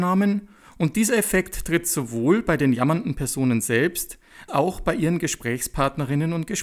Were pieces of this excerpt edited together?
yes; 1 cut; at 4.5 s

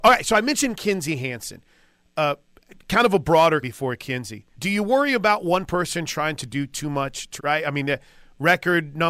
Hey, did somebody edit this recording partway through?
yes; 3 cuts; at 3.6 s, 4.5 s, 7.4 s

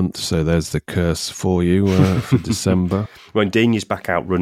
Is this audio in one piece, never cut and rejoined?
yes; 0 cuts

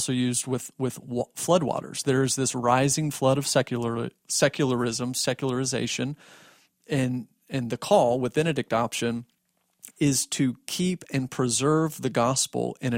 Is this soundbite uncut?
no; 1 cut; at 8.3 s

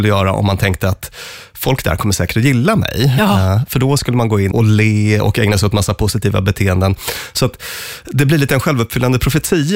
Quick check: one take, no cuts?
no; 1 cut; at 4.5 s

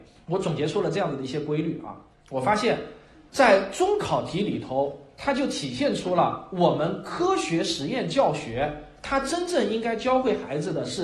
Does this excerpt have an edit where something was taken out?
no; 0 cuts

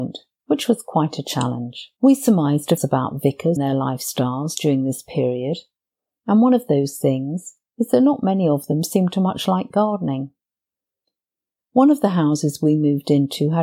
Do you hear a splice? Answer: yes; 3 cuts; at 2.0 s, 2.8 s, 3.6 s

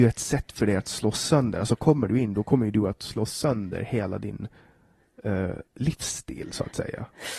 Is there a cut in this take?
yes; 1 cut; at 5.7 s

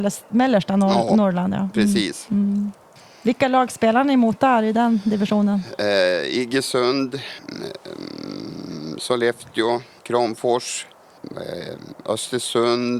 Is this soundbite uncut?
yes; 0 cuts

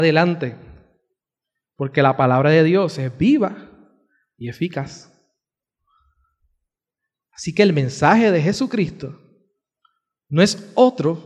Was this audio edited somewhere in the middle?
no; 0 cuts

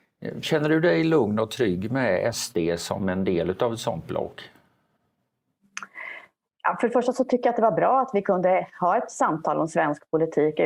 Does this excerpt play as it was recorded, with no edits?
yes; 0 cuts

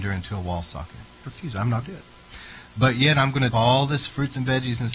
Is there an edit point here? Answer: yes; 3 cuts; at 1.2 s, 1.8 s, 3.5 s

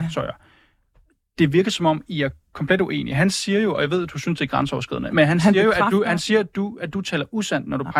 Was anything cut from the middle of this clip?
no; 0 cuts

